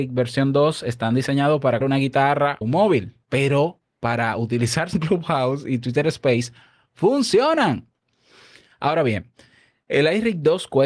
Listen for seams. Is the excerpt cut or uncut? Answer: cut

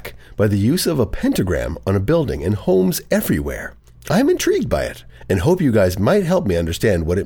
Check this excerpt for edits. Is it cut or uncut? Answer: uncut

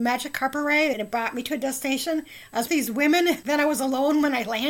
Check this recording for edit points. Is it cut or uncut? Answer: cut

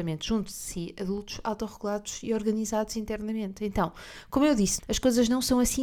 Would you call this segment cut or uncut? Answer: cut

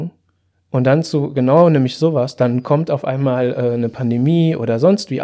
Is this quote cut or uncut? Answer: uncut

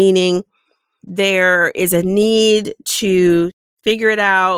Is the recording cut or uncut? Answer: uncut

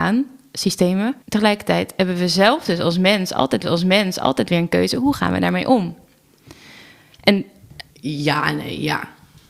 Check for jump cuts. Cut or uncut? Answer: cut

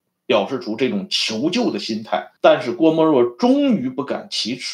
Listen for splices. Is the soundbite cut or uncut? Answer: cut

